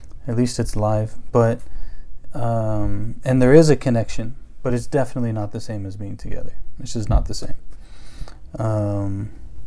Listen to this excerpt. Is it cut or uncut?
uncut